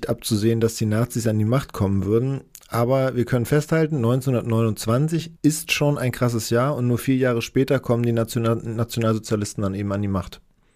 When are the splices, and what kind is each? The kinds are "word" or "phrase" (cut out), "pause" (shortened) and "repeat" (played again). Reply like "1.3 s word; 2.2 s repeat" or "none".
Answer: 5.4 s pause